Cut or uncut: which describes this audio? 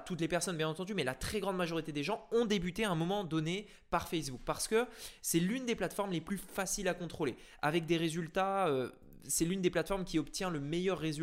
uncut